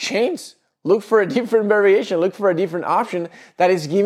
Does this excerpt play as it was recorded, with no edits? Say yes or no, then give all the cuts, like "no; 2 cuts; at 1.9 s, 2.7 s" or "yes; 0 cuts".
yes; 0 cuts